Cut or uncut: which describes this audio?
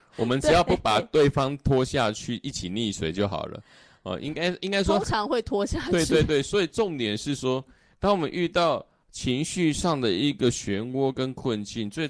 uncut